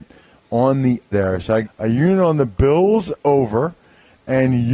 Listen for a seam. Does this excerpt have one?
yes; 2 cuts; at 1.1 s, 1.6 s

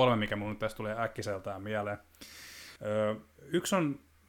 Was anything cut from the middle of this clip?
yes; 1 cut; at 2.8 s

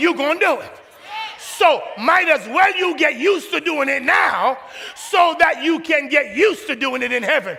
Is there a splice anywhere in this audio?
no; 0 cuts

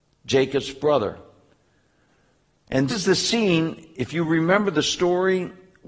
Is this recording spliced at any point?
yes; 1 cut; at 2.9 s

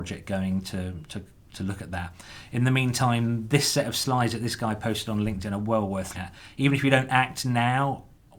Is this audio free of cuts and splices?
no; 1 cut; at 6.1 s

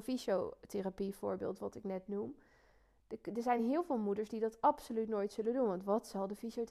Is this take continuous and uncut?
yes; 0 cuts

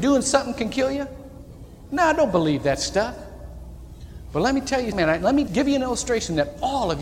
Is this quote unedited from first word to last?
no; 2 cuts; at 4.9 s, 5.5 s

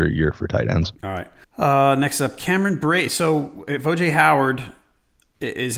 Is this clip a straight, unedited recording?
no; 2 cuts; at 1.0 s, 1.4 s

